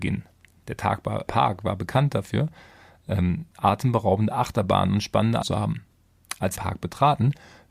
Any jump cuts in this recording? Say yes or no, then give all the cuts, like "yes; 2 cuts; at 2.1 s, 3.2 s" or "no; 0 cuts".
yes; 4 cuts; at 1.3 s, 3.5 s, 5.4 s, 6.6 s